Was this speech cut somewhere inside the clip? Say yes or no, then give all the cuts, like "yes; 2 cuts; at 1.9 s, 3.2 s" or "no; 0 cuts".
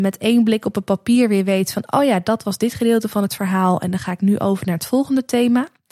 no; 0 cuts